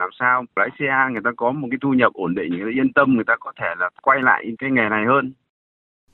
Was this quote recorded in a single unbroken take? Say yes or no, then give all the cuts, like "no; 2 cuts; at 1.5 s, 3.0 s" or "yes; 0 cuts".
yes; 0 cuts